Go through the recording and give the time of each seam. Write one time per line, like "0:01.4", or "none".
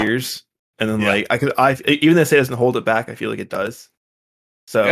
none